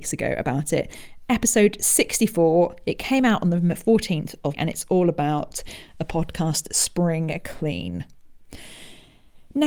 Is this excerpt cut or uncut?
cut